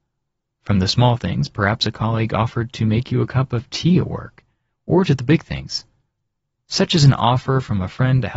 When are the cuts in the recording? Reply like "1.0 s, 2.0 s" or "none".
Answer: none